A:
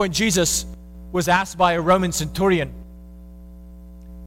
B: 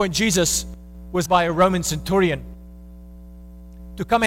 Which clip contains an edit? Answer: B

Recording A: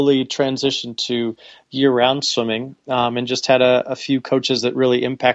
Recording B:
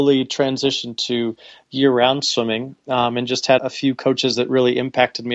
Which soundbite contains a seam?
B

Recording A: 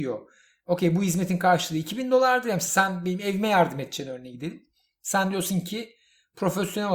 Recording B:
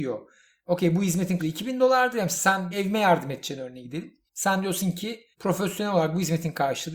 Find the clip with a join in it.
B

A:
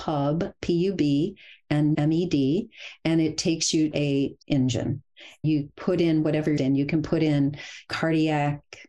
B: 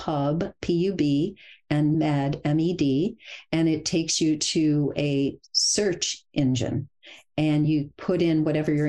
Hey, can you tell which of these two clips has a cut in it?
A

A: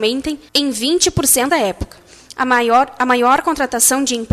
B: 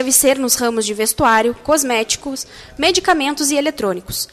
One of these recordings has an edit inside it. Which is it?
A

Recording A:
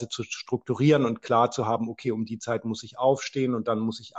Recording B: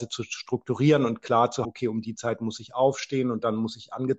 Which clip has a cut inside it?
B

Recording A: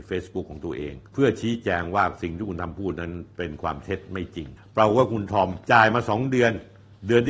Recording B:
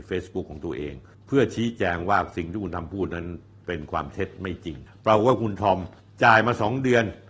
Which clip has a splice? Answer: A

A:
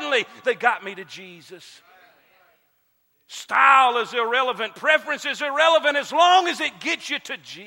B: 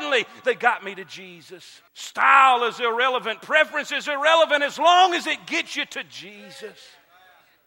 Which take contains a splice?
B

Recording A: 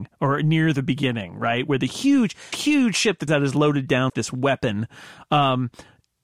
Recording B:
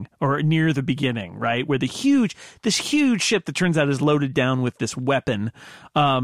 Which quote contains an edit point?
A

